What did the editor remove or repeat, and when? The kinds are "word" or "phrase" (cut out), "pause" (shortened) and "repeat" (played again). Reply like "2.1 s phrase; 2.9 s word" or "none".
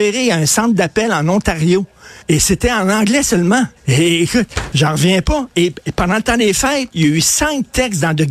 2.2 s pause; 3.8 s pause